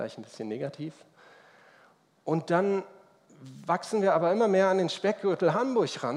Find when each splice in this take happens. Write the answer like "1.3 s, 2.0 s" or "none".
none